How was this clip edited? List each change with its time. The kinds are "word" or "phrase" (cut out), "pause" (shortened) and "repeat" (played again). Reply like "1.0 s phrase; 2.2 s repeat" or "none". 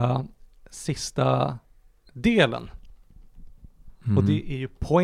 none